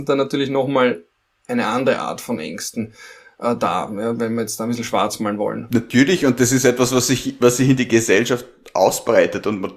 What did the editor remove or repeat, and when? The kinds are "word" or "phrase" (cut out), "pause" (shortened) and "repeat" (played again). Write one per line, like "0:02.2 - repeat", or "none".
none